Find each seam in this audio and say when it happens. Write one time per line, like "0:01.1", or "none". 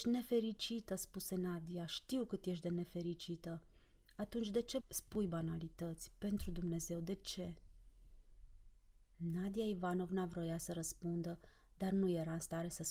none